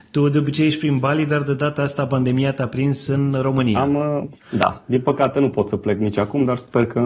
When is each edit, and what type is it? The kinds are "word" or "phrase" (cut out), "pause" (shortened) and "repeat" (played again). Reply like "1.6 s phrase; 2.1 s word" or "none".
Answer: 4.4 s pause